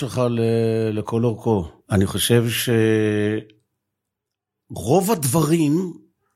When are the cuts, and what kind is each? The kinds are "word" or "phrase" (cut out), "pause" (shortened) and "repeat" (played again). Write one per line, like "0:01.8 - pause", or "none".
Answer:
0:01.8 - pause